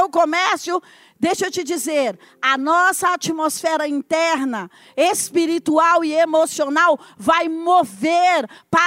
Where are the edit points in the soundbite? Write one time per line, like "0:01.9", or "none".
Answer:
none